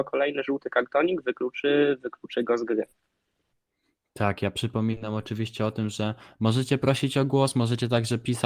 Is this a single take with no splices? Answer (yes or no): no